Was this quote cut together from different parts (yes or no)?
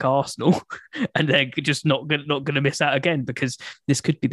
no